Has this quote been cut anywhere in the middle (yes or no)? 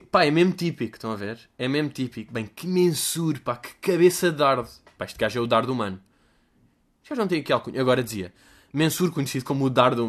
no